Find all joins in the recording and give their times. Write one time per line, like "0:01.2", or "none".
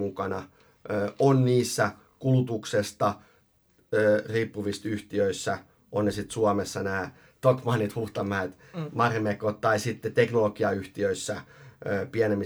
none